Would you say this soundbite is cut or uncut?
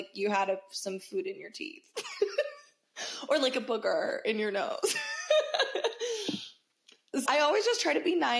cut